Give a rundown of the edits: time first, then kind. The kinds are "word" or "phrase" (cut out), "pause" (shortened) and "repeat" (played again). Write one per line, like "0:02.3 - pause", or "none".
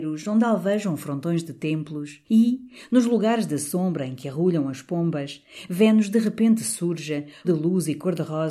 0:02.2 - pause
0:07.4 - word

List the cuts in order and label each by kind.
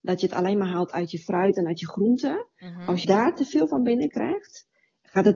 0:03.0 - word

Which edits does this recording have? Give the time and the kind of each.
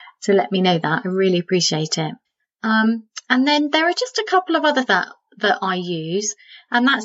0:02.2 - pause
0:04.9 - word

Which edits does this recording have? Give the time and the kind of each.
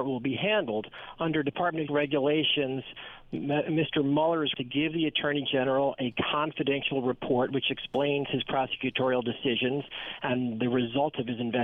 0:01.9 - word
0:04.5 - word

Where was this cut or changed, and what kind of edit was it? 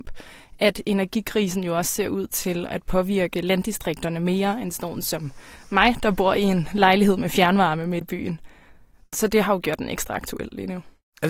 0:08.0 - word

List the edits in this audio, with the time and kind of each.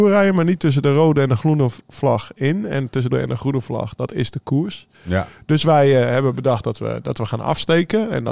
0:01.8 - pause
0:03.1 - word
0:04.9 - pause

